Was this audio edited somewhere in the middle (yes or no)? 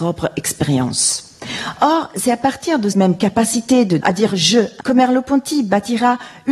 yes